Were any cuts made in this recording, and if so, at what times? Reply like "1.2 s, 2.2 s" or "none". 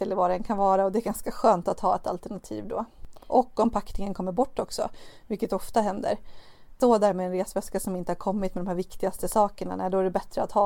none